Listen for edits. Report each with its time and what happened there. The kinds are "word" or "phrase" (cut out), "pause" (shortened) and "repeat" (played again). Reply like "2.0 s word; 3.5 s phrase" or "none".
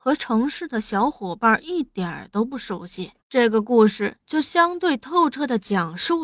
3.2 s pause